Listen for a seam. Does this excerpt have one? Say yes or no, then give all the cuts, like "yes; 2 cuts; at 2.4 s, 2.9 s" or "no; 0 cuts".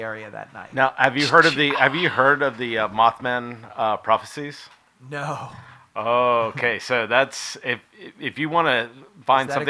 no; 0 cuts